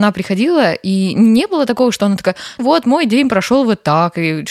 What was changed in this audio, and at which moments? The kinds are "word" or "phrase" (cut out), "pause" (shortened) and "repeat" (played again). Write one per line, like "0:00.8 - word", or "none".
0:02.6 - word